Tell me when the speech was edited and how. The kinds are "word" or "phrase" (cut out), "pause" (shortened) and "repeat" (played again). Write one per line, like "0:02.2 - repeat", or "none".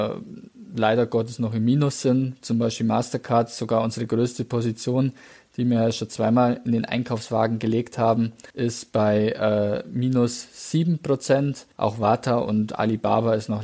0:08.5 - pause
0:11.7 - pause